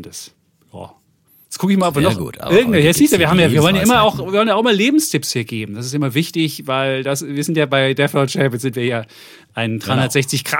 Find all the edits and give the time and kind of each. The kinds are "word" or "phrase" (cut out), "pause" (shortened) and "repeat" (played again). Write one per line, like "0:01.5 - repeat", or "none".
0:01.3 - pause

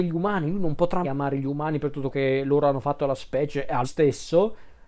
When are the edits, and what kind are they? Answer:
0:01.0 - word
0:02.1 - word
0:03.2 - word
0:03.8 - word

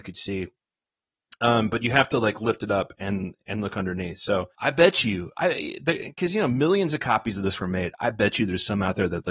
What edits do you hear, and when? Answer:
0:04.6 - pause

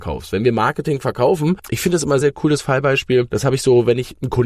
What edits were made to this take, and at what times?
0:02.2 - word

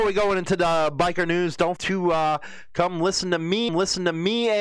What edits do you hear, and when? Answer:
0:01.8 - word
0:03.7 - repeat

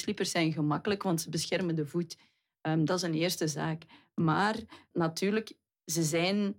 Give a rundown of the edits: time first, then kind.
0:04.9 - word

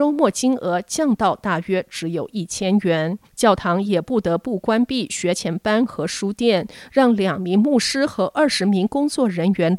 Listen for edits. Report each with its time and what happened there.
0:03.3 - pause

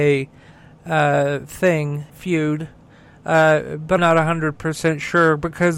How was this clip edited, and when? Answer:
0:02.1 - word
0:04.0 - word

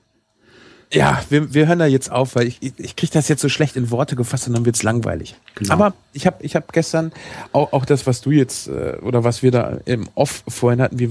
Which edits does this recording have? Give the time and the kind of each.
none

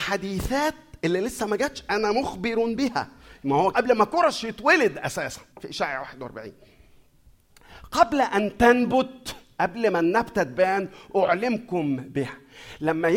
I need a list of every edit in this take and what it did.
0:03.7 - phrase
0:05.5 - pause

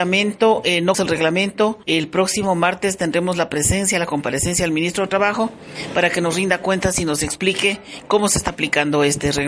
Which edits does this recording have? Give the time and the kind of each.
0:00.9 - word
0:01.8 - pause

